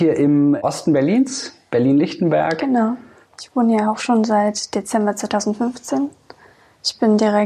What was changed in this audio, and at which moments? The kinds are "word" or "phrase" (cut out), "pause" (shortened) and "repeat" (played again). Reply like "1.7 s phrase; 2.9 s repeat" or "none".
none